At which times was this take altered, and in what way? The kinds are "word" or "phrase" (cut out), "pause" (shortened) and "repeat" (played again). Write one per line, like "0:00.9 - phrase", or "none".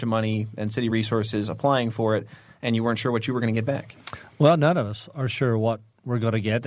none